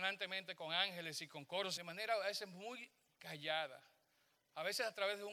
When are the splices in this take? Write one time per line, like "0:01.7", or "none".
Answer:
0:01.8

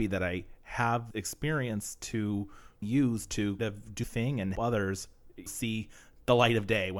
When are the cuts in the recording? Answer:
0:01.1
0:02.8
0:03.6
0:04.0
0:04.6
0:05.5

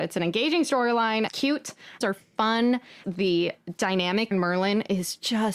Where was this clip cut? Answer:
0:01.3
0:02.0
0:03.0
0:04.3

